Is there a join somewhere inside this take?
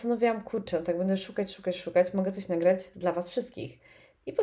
no; 0 cuts

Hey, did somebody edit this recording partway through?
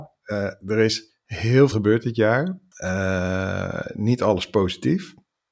yes; 1 cut; at 1.7 s

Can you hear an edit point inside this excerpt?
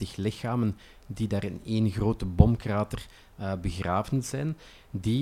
no; 0 cuts

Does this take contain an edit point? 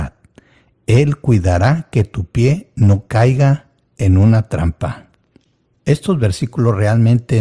no; 0 cuts

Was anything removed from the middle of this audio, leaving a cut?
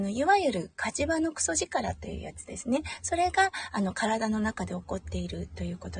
no; 0 cuts

